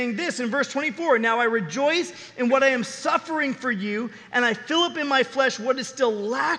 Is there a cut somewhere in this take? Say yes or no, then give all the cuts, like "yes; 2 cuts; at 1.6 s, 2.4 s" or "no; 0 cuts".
no; 0 cuts